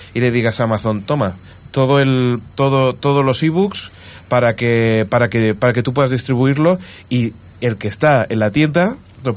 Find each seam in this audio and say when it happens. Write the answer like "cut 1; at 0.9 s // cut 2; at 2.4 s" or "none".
none